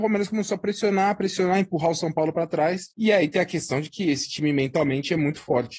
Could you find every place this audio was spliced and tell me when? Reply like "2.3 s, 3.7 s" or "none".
2.9 s